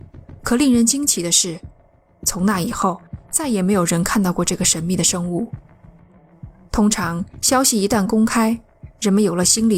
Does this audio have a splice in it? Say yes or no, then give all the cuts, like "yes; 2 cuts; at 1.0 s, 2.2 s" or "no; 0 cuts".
no; 0 cuts